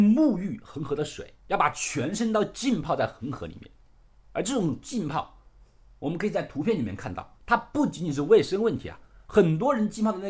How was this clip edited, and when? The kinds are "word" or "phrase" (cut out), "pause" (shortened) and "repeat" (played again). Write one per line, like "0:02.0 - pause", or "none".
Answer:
0:01.4 - pause
0:07.3 - pause